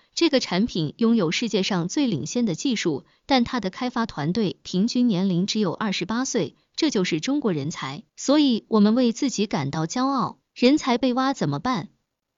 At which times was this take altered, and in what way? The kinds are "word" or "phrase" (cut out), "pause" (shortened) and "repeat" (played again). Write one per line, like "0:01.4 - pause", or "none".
0:08.1 - pause
0:10.4 - pause